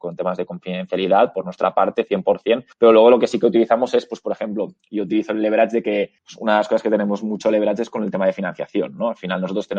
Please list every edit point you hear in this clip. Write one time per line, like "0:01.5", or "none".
0:02.7
0:06.2